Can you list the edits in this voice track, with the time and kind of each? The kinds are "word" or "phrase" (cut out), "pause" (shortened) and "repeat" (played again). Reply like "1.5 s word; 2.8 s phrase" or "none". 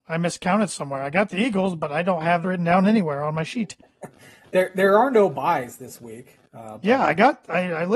2.4 s word